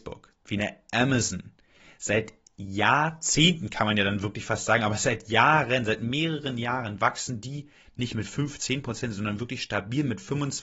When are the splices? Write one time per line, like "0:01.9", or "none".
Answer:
none